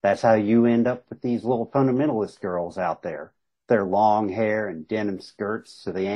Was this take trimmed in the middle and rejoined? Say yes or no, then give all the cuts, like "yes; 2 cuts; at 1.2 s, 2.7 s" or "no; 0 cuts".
no; 0 cuts